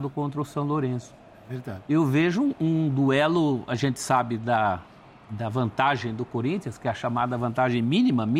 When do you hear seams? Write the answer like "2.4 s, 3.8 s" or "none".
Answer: none

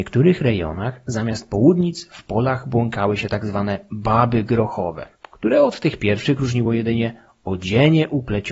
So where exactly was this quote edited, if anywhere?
none

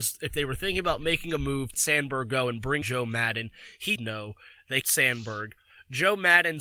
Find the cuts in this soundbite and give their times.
1.7 s, 2.8 s, 4.0 s, 4.8 s

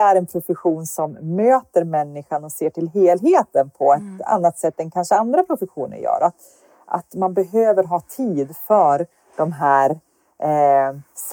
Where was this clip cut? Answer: none

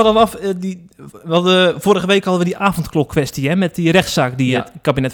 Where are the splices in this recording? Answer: none

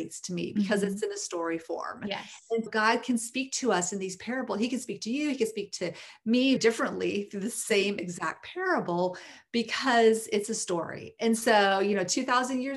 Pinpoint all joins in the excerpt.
2.7 s, 6.6 s

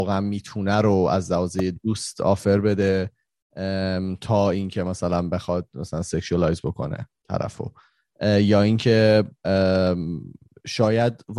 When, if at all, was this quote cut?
none

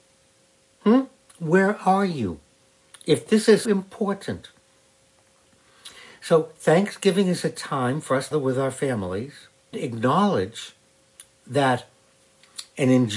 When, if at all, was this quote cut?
3.6 s, 8.3 s, 9.7 s

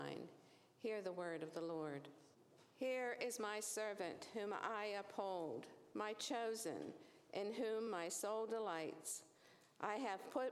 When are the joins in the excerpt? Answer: none

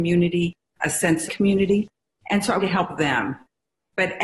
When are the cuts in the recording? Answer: 1.3 s, 2.6 s

